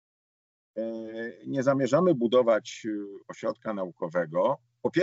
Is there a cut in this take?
no; 0 cuts

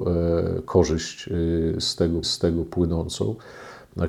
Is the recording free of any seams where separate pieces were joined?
no; 1 cut; at 2.2 s

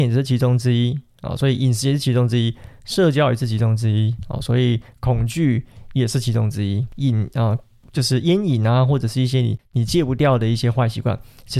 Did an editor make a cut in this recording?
no; 0 cuts

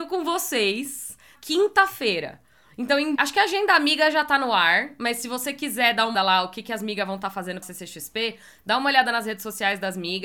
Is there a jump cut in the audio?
yes; 4 cuts; at 1.4 s, 3.2 s, 6.1 s, 7.6 s

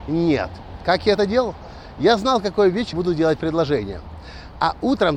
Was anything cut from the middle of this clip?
yes; 1 cut; at 2.9 s

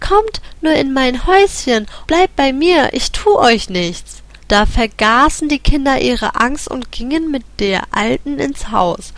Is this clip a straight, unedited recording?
no; 2 cuts; at 2.1 s, 4.4 s

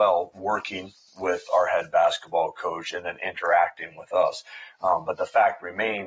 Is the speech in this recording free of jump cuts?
yes; 0 cuts

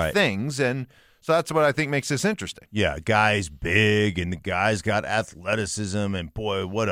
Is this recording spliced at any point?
no; 0 cuts

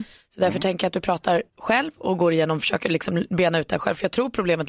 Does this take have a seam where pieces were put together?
yes; 1 cut; at 1.5 s

